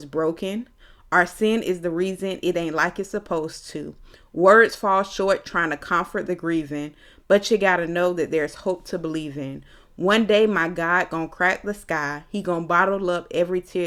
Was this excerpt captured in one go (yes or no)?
yes